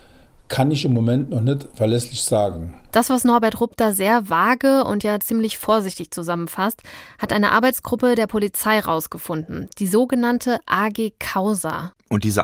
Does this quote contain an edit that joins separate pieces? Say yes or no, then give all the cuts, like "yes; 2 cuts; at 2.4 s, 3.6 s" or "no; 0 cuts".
yes; 1 cut; at 2.8 s